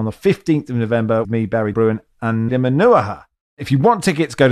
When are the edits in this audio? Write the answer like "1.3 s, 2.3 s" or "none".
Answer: 1.2 s, 1.7 s, 2.5 s